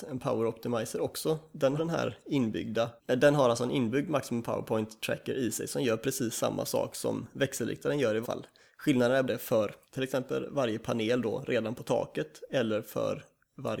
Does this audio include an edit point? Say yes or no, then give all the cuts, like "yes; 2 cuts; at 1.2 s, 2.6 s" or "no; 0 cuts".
yes; 5 cuts; at 1.8 s, 3.0 s, 8.2 s, 9.3 s, 9.8 s